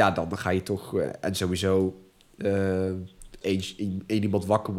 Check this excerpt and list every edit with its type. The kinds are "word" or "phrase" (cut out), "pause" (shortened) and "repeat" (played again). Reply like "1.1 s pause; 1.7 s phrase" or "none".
3.4 s word